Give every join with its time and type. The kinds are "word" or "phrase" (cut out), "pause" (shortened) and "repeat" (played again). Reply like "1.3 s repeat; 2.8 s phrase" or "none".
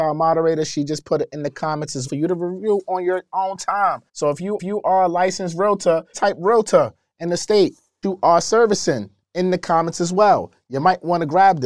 2.1 s word; 4.1 s pause; 4.6 s repeat; 6.1 s word; 8.0 s word